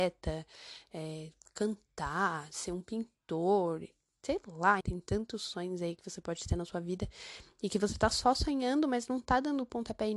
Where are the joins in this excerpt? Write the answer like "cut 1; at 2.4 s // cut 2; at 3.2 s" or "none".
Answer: cut 1; at 4.8 s